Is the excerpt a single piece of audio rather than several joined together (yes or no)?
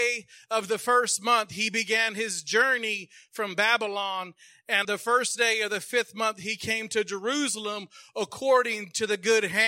no